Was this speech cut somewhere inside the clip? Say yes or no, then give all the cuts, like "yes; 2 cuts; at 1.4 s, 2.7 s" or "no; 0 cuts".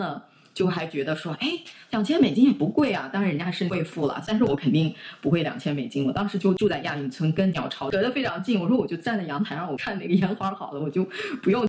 no; 0 cuts